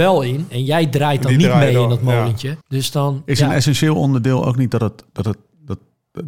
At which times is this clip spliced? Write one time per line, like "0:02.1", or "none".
0:02.6
0:05.1